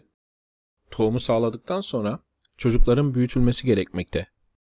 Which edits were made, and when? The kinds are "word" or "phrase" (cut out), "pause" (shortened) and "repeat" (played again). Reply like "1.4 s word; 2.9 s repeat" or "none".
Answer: none